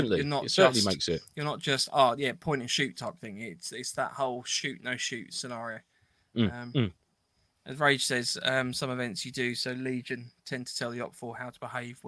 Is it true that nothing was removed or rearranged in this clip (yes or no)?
yes